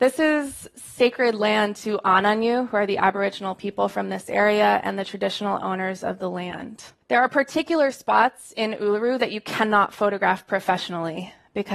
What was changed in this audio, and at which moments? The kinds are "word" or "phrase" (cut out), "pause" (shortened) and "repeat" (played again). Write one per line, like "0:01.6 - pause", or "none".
0:07.0 - pause